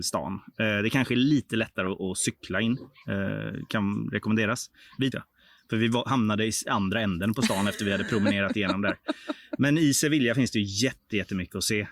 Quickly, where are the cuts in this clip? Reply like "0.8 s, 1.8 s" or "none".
5.1 s